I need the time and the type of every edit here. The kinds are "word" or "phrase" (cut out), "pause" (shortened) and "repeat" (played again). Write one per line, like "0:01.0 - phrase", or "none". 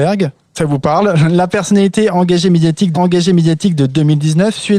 0:02.9 - repeat

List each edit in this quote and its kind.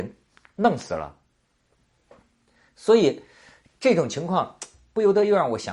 none

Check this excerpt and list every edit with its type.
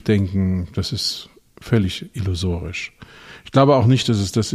none

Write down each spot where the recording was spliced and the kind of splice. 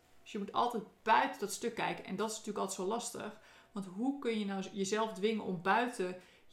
none

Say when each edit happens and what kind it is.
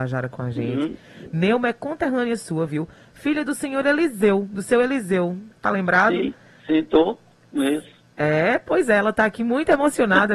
none

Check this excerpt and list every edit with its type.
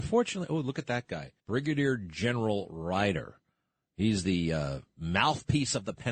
0:01.4 - pause

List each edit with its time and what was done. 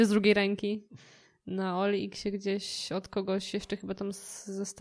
none

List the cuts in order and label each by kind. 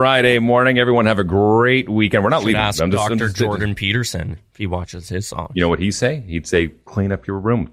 none

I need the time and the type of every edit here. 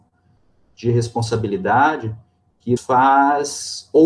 0:02.8 - word

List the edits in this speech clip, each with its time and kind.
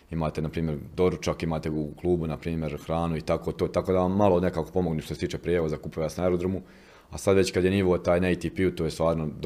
none

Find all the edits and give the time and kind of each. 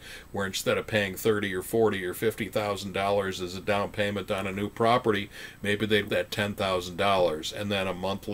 0:06.1 - phrase

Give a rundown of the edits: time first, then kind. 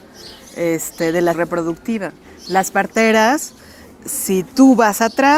0:01.3 - word

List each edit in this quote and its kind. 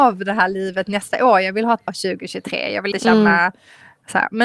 0:01.9 - word
0:02.9 - word

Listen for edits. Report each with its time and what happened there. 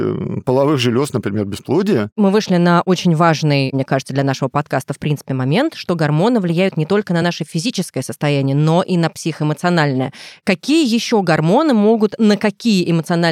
none

